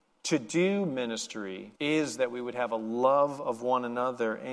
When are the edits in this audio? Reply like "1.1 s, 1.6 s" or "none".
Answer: 1.7 s